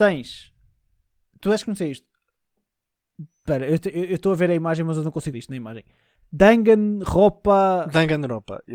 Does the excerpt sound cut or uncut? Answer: cut